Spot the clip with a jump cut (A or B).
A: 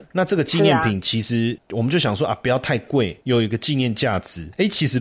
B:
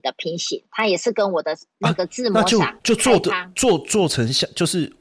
B